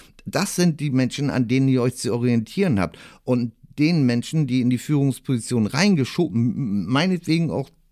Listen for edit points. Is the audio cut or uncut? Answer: uncut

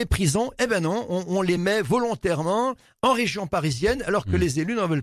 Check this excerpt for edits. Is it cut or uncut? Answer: uncut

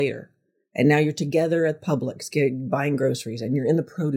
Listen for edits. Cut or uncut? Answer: uncut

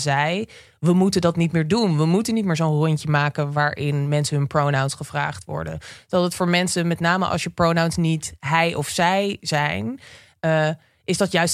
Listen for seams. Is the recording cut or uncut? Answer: uncut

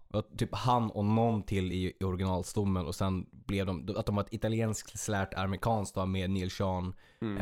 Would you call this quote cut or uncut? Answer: uncut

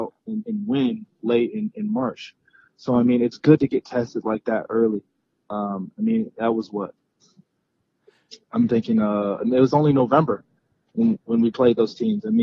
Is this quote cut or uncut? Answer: uncut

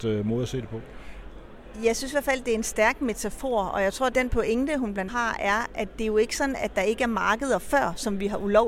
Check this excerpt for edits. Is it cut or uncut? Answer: cut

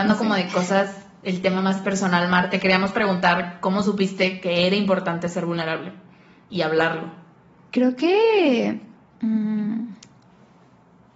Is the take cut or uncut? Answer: uncut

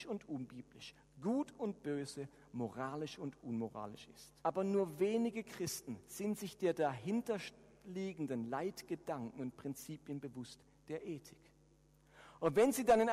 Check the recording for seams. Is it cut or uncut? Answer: cut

